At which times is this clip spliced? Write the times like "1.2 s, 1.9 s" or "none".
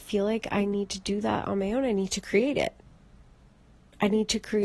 none

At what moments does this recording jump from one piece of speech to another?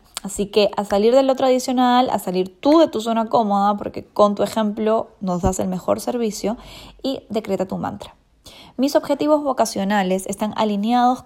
none

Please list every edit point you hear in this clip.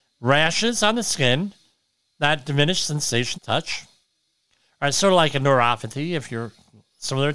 3.3 s

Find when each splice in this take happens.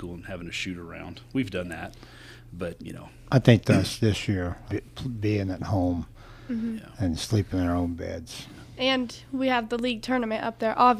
2.8 s, 3.6 s, 4.7 s

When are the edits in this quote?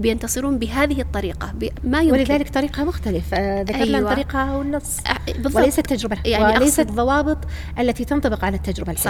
1.8 s, 6.2 s, 6.9 s

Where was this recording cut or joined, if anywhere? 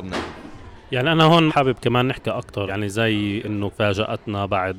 1.5 s, 2.7 s, 3.7 s

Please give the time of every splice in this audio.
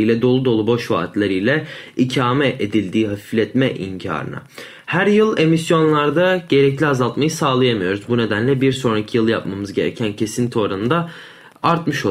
none

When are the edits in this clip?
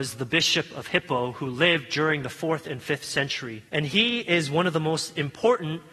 3.7 s

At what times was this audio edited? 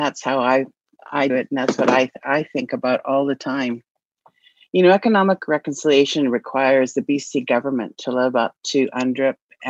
1.3 s

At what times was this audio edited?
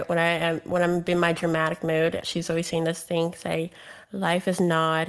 2.2 s, 4.0 s

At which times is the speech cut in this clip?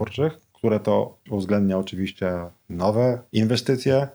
1.3 s

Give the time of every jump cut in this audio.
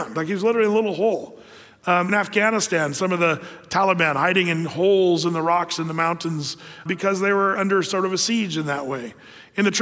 2.1 s, 6.9 s, 7.6 s

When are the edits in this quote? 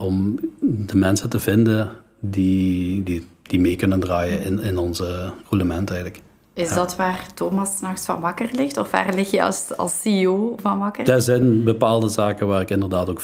none

